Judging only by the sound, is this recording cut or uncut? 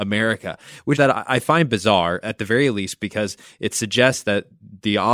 cut